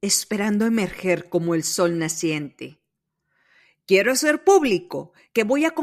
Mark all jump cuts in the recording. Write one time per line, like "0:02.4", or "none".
none